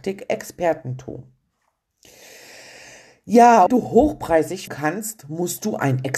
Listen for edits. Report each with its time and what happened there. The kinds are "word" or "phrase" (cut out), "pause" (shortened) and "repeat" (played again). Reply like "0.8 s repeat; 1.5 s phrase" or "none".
3.7 s phrase; 4.7 s word